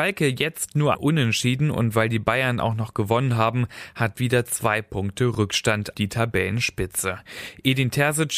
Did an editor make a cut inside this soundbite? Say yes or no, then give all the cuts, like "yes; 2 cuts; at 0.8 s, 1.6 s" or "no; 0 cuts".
yes; 3 cuts; at 0.9 s, 4.1 s, 5.9 s